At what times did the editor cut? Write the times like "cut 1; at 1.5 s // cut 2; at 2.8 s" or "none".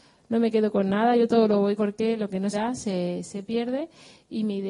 cut 1; at 1.8 s // cut 2; at 2.5 s